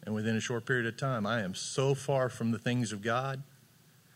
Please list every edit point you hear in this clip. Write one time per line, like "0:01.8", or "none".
none